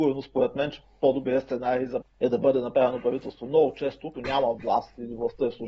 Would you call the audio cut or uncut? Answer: cut